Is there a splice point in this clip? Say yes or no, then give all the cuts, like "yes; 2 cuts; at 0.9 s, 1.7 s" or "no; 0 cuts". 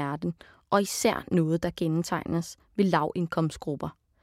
no; 0 cuts